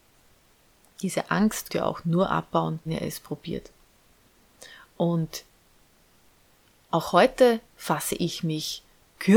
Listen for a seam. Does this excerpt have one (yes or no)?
yes